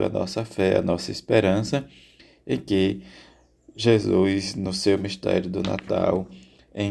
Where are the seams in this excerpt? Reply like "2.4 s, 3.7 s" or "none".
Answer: none